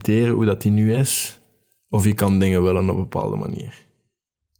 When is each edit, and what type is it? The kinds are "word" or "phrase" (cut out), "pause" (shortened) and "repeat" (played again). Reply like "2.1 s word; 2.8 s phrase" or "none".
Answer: none